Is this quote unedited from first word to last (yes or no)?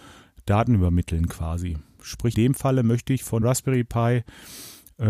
no